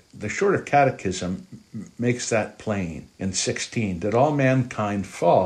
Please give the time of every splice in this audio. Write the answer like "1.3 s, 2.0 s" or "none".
3.1 s

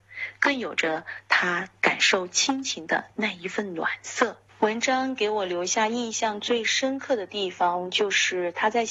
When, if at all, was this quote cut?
4.5 s

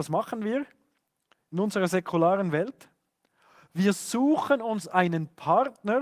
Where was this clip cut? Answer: none

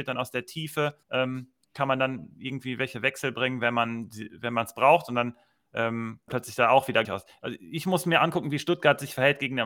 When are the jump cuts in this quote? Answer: 1.0 s, 6.3 s, 7.0 s

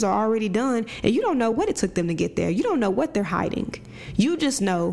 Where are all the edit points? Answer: none

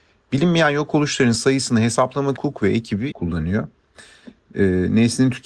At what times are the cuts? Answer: 2.4 s, 3.1 s

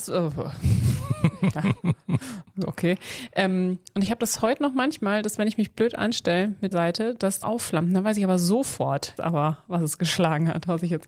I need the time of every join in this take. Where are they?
6.7 s, 7.4 s, 9.2 s

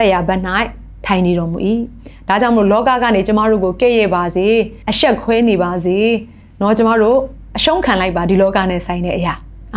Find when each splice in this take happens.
4.8 s

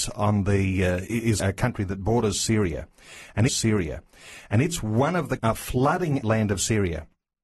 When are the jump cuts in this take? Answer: 1.4 s, 3.5 s, 5.4 s, 6.2 s

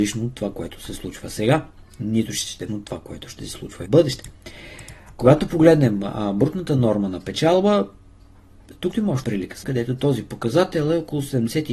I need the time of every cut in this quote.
2.7 s, 3.9 s, 8.9 s, 9.2 s, 9.6 s

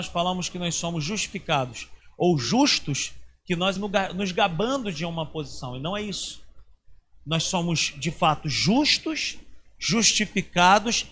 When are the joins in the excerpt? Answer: 3.8 s

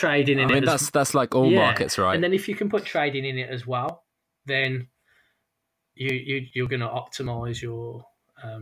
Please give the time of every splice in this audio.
none

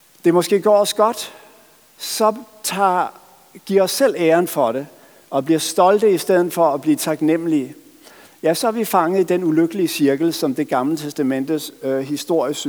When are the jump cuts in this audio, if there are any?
none

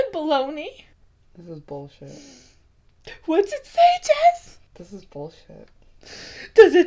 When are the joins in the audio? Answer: 1.0 s, 4.7 s

